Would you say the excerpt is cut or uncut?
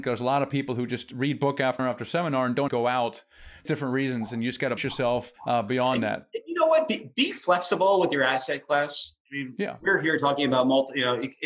cut